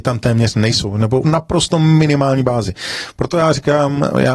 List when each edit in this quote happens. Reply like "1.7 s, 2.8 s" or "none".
1.2 s